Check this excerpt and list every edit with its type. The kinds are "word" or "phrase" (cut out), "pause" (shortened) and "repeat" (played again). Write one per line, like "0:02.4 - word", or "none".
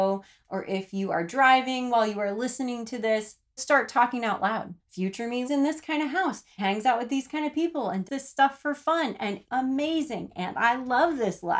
0:03.6 - word
0:04.8 - pause
0:05.4 - word
0:06.6 - word
0:08.1 - word
0:09.4 - word